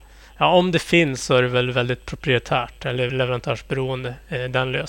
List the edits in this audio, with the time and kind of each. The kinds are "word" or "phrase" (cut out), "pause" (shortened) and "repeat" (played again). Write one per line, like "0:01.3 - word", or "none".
0:03.1 - word